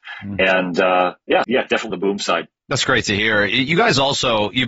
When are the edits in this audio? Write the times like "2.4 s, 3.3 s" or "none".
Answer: 1.4 s, 1.9 s